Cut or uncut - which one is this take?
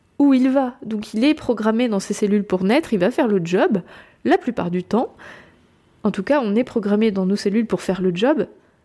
uncut